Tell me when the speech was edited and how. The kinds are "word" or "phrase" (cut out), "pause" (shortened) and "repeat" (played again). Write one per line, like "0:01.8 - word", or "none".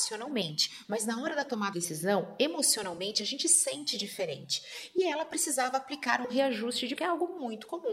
0:01.7 - word
0:07.0 - word